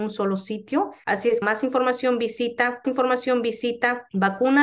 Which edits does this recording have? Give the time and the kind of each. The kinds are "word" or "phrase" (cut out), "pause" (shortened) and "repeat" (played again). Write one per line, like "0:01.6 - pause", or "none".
0:01.4 - word
0:02.8 - repeat